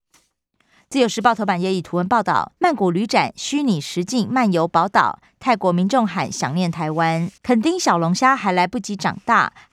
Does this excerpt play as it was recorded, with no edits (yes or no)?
no